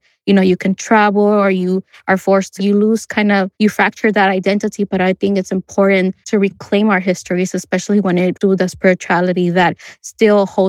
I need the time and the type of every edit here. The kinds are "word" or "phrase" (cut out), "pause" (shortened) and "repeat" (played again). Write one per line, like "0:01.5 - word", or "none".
0:02.6 - word
0:03.5 - pause
0:06.2 - pause
0:08.3 - word